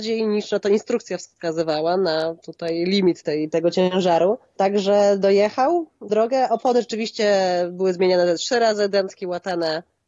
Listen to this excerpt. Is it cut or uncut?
cut